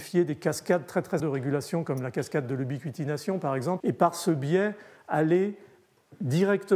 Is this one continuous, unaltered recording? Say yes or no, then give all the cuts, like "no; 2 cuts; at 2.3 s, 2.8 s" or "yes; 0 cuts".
no; 2 cuts; at 1.2 s, 3.8 s